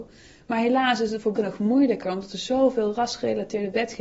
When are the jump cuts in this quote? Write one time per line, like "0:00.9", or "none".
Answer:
0:01.4